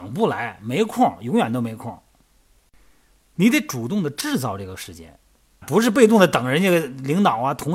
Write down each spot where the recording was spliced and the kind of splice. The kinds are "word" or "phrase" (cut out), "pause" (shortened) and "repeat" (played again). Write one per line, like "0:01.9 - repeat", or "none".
0:05.6 - word